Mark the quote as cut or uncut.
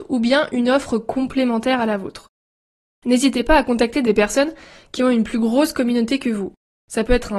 uncut